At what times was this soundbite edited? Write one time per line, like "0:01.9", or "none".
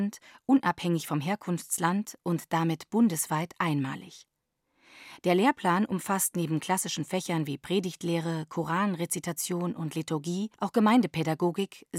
0:10.5

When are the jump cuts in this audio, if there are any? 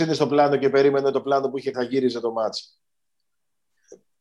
0:01.1
0:01.7

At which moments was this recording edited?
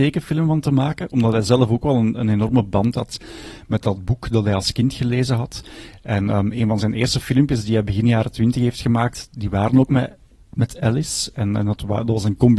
none

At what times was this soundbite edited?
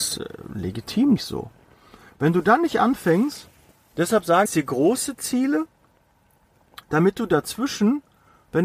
0:01.2
0:04.5

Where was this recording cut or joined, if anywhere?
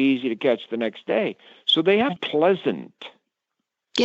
0:02.2

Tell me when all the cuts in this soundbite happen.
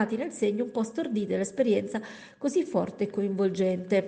none

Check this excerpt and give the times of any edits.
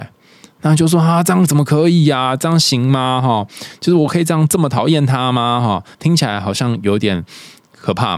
0:05.9

